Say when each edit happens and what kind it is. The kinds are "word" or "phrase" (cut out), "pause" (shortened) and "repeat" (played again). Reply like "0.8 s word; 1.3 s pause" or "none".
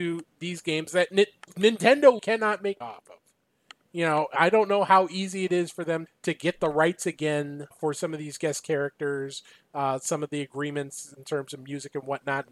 2.2 s word; 2.8 s word; 6.1 s word; 7.7 s word